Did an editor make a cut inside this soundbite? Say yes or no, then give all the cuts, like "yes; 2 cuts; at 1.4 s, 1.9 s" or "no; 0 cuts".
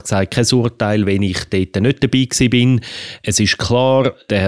no; 0 cuts